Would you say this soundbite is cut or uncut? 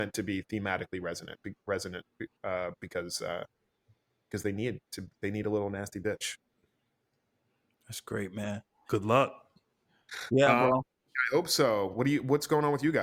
uncut